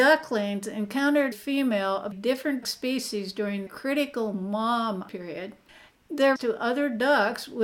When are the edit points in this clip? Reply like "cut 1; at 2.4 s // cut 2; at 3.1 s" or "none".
cut 1; at 1.3 s // cut 2; at 2.1 s // cut 3; at 2.6 s // cut 4; at 3.7 s // cut 5; at 5.1 s // cut 6; at 6.4 s